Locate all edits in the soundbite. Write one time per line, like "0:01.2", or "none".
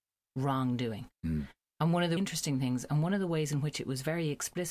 0:01.1
0:02.2